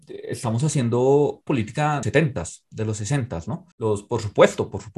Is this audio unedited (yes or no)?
no